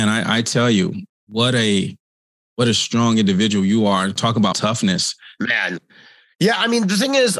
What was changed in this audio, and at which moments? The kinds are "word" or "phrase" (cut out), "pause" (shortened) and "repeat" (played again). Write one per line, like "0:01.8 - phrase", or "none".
0:04.5 - word